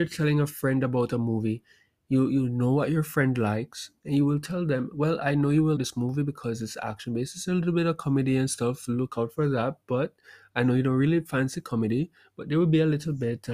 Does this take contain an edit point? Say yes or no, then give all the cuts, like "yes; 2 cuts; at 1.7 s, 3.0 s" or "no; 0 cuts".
yes; 1 cut; at 5.7 s